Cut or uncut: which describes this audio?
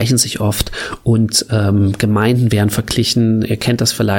uncut